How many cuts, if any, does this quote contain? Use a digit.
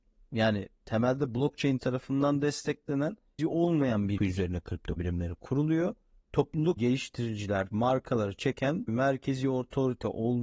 6